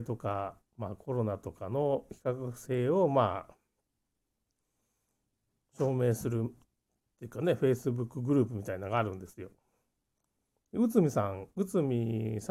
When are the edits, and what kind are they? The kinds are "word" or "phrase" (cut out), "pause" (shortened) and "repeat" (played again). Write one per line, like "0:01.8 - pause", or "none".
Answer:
none